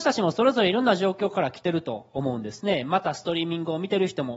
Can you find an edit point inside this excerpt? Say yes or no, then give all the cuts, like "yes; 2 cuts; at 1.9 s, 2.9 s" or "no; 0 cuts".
no; 0 cuts